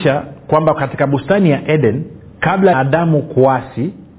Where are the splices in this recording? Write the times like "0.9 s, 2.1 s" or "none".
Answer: 2.7 s